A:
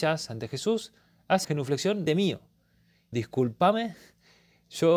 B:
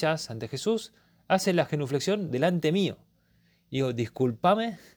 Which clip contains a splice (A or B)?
A